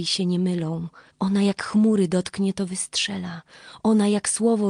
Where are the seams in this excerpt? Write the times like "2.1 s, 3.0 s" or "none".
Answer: 1.1 s